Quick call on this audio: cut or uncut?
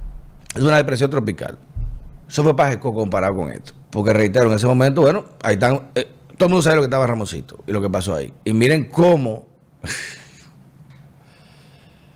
cut